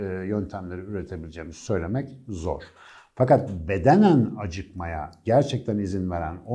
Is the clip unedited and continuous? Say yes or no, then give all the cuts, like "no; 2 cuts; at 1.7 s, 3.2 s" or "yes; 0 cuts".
yes; 0 cuts